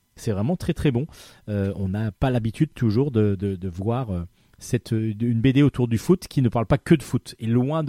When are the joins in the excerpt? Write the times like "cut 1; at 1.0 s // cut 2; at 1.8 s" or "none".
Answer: cut 1; at 2.2 s